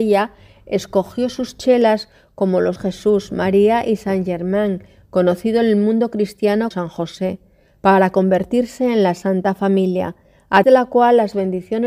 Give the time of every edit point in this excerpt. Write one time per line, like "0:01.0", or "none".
0:02.8
0:06.7
0:10.6